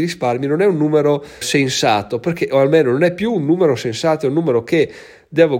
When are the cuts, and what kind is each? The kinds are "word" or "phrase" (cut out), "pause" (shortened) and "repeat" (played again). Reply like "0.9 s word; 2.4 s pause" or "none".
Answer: 1.4 s word